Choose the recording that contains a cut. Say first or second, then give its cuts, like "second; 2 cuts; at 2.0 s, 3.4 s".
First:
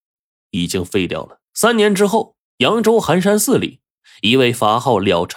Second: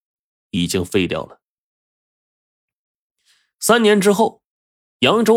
first; 2 cuts; at 1.5 s, 2.5 s